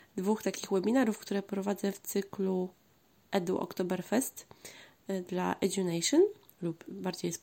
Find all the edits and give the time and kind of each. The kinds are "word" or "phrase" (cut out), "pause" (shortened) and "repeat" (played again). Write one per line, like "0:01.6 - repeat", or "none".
none